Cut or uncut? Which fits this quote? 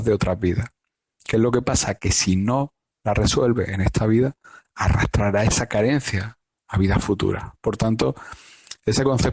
uncut